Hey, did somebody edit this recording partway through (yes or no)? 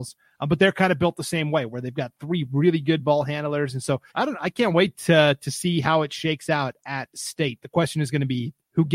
yes